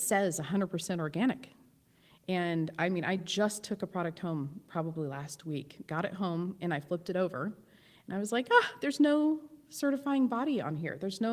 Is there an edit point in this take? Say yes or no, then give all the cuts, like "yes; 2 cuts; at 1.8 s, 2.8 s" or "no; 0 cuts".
no; 0 cuts